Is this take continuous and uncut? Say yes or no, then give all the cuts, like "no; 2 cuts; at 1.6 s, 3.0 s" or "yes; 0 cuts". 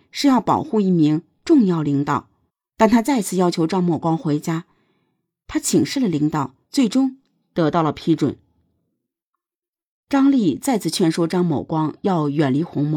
no; 2 cuts; at 2.5 s, 6.6 s